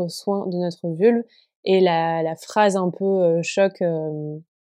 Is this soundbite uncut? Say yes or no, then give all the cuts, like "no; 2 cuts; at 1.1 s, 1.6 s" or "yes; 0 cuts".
yes; 0 cuts